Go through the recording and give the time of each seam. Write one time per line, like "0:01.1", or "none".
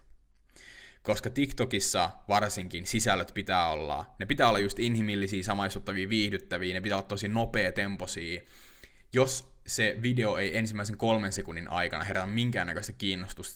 none